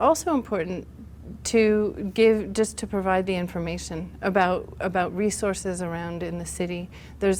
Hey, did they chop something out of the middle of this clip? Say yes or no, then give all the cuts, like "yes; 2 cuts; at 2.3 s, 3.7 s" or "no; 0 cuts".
no; 0 cuts